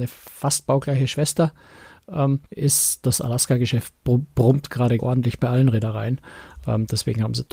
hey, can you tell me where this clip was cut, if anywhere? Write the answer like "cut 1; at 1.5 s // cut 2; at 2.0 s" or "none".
cut 1; at 2.5 s // cut 2; at 5.0 s